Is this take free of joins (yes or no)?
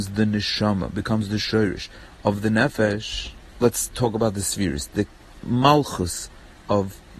no